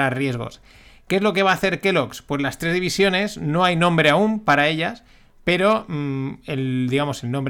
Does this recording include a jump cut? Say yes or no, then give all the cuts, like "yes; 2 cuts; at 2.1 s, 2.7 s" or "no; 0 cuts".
no; 0 cuts